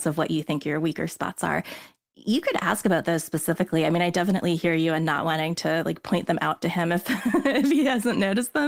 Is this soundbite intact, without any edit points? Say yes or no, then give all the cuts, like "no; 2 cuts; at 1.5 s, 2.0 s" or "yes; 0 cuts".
yes; 0 cuts